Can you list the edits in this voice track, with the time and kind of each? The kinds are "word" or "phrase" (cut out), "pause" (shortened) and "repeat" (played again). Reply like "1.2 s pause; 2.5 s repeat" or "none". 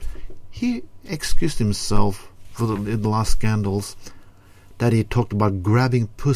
none